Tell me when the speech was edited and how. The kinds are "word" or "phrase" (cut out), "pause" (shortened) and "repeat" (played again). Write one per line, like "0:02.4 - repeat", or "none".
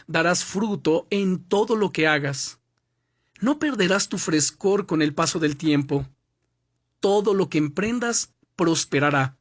none